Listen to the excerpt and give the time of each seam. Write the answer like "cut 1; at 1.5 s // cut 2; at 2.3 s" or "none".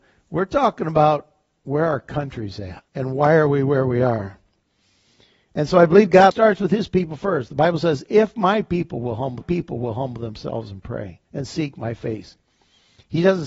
cut 1; at 2.9 s // cut 2; at 6.3 s // cut 3; at 9.4 s // cut 4; at 11.2 s